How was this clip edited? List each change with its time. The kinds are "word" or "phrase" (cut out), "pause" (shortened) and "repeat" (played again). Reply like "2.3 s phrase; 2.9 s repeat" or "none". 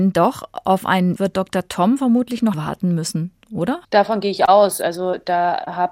1.2 s word; 2.5 s word; 3.8 s pause